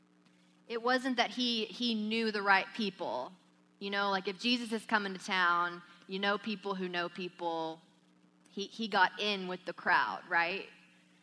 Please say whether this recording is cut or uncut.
uncut